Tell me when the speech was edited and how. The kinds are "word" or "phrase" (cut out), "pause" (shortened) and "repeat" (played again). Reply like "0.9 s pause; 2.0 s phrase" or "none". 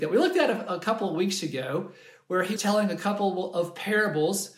2.6 s word